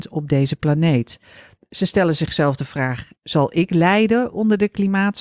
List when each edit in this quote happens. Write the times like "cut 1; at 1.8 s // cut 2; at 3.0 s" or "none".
cut 1; at 3.2 s

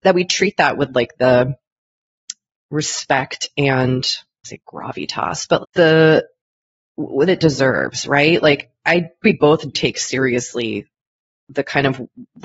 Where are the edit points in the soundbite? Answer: cut 1; at 4.4 s // cut 2; at 5.6 s // cut 3; at 7.3 s // cut 4; at 9.2 s // cut 5; at 9.7 s

